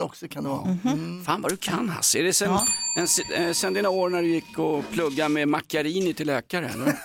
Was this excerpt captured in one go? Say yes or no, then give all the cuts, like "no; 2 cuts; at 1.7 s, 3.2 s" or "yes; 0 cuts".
yes; 0 cuts